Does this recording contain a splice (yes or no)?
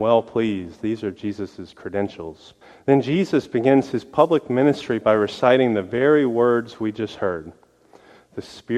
yes